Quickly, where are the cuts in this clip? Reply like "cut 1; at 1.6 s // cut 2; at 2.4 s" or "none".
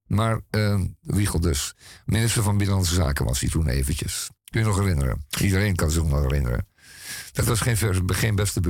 cut 1; at 4.4 s